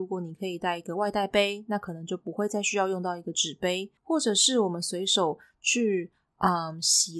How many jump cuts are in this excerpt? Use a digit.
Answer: 1